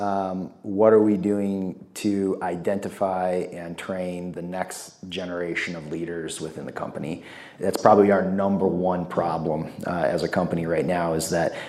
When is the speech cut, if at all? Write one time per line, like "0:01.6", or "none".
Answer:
none